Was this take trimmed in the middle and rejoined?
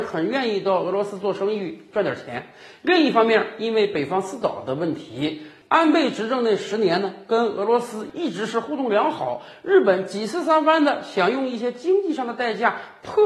no; 0 cuts

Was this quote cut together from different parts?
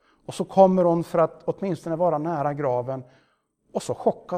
no; 0 cuts

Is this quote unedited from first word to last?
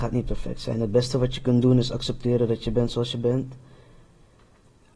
yes; 0 cuts

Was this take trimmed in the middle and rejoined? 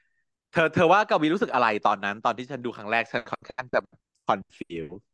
no; 0 cuts

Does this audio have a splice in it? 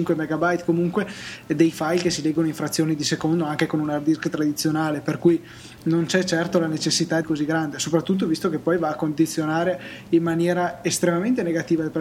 yes; 1 cut; at 7.2 s

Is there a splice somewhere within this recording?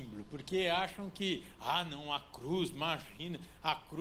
no; 0 cuts

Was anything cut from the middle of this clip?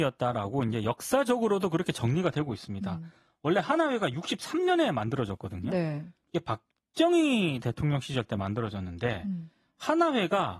no; 0 cuts

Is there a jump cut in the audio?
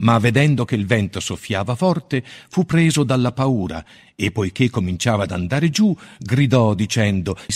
no; 0 cuts

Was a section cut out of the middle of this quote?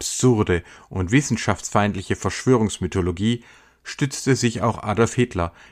no; 0 cuts

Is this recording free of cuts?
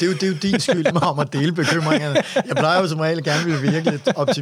no; 1 cut; at 0.9 s

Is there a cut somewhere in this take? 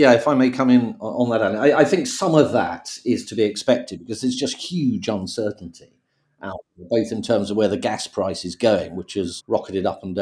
no; 0 cuts

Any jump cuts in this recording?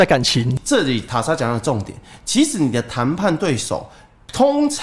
no; 0 cuts

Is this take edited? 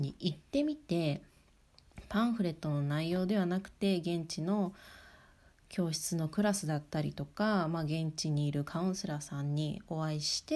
no; 0 cuts

